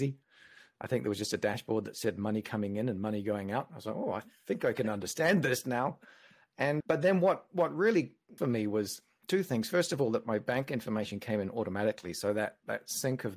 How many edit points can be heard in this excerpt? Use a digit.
2